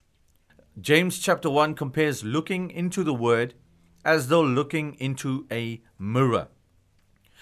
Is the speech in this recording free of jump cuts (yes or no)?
yes